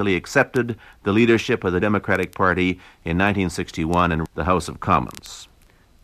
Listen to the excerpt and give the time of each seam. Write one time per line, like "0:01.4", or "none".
0:01.8
0:04.3